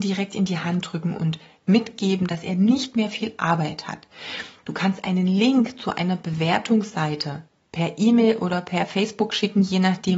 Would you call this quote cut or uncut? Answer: uncut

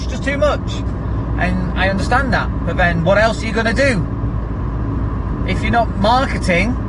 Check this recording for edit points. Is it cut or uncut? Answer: uncut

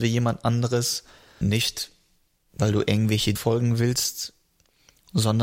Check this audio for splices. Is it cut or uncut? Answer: cut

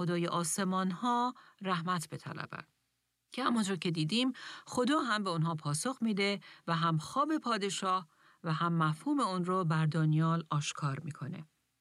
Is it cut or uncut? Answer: uncut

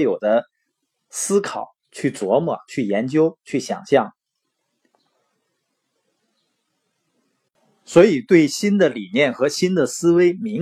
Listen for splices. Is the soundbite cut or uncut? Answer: uncut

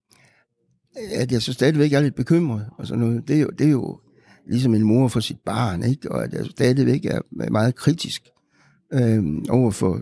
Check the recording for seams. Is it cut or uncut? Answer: uncut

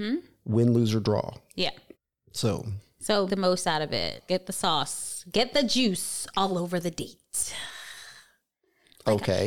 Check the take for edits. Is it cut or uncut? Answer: cut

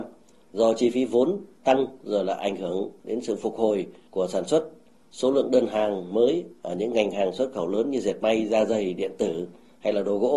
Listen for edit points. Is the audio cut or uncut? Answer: uncut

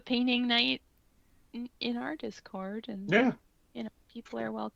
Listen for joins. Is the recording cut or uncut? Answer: uncut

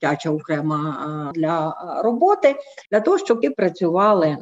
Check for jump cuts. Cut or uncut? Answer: cut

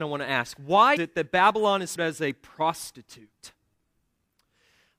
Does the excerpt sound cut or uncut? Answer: cut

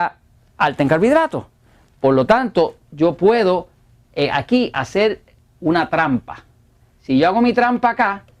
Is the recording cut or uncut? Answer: uncut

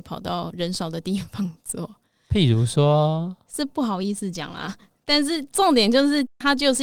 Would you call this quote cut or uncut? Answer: uncut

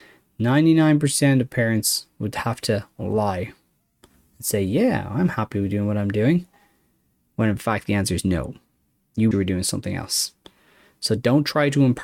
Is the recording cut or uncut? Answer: cut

